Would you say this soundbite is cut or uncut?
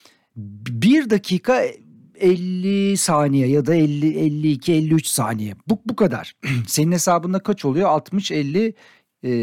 uncut